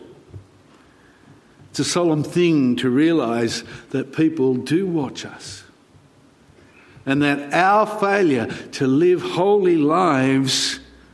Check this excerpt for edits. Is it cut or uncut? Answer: uncut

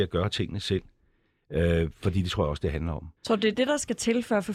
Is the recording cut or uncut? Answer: cut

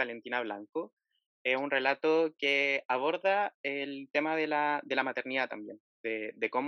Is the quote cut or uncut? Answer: uncut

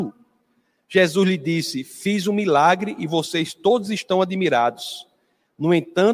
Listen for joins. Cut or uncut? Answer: uncut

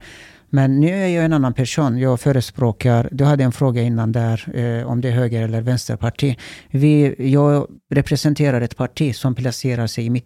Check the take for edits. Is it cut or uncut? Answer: cut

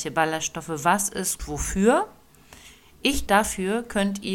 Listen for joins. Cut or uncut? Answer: cut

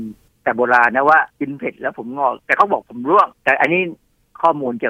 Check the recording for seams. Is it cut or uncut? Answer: cut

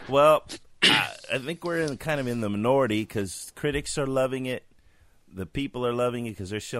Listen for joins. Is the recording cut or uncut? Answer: uncut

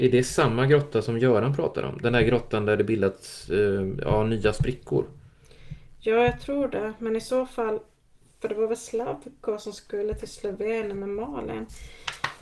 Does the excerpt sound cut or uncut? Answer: uncut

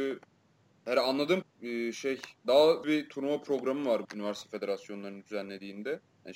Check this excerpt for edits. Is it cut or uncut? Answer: cut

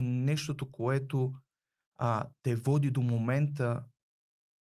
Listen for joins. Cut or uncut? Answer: uncut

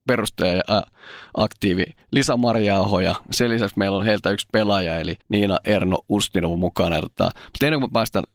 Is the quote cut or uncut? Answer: cut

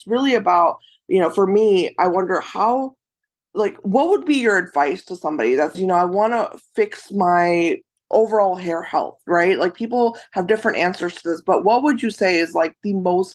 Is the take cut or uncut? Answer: cut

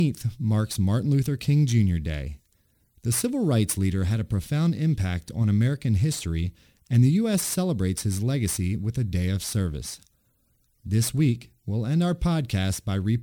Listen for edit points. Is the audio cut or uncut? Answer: uncut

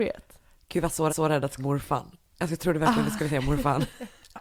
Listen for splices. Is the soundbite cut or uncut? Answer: cut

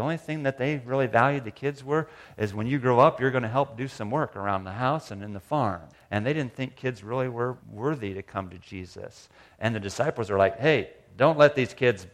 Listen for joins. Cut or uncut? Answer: cut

